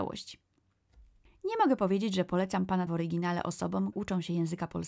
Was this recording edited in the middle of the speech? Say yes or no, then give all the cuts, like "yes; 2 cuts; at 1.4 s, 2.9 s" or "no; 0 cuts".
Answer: yes; 2 cuts; at 2.9 s, 3.9 s